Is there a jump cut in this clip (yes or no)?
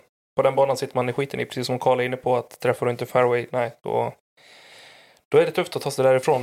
no